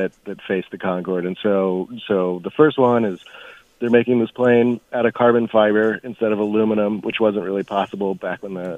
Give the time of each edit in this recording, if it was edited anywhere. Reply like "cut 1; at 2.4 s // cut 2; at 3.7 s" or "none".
none

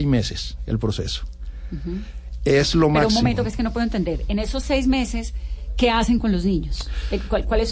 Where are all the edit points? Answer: none

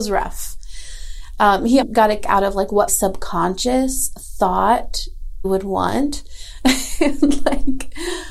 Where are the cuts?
cut 1; at 1.8 s // cut 2; at 2.2 s // cut 3; at 2.9 s // cut 4; at 5.4 s

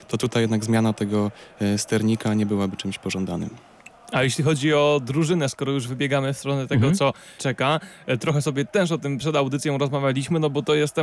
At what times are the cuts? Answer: cut 1; at 7.4 s

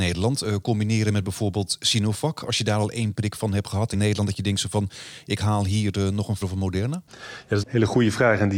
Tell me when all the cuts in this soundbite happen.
cut 1; at 3.9 s // cut 2; at 6.4 s // cut 3; at 7.6 s

